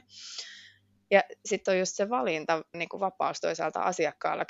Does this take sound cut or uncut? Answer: cut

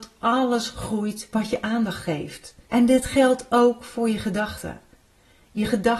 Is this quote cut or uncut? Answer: cut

